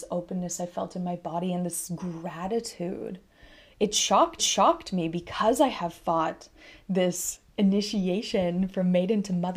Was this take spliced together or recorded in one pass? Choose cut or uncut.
cut